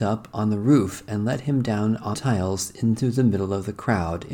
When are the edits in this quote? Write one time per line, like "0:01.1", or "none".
0:02.1